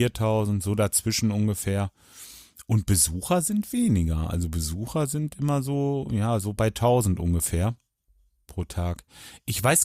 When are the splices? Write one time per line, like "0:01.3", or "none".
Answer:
none